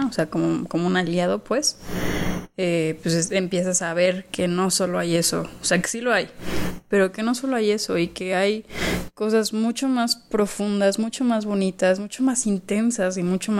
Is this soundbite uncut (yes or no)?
yes